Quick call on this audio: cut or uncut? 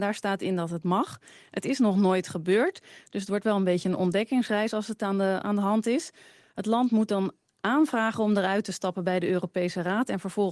uncut